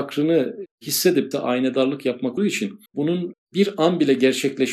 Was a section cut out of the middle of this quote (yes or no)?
yes